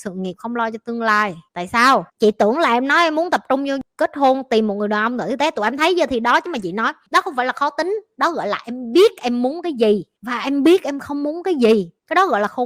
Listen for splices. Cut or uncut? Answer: cut